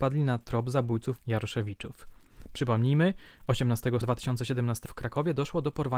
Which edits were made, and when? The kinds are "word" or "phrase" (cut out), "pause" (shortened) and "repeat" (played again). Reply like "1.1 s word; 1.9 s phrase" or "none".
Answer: 1.2 s word; 4.0 s word; 4.8 s word